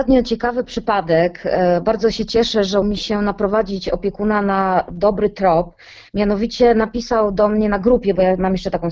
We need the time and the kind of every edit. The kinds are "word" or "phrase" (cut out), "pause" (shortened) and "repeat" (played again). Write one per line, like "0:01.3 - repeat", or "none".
0:02.8 - word